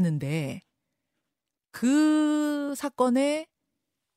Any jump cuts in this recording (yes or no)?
no